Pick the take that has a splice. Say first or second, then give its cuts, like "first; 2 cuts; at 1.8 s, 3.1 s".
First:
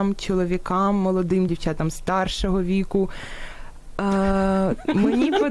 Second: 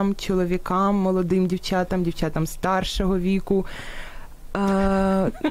first; 1 cut; at 1.5 s